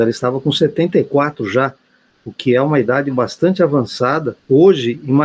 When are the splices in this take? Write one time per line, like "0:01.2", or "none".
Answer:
none